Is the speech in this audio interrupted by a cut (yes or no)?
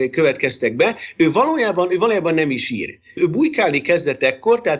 no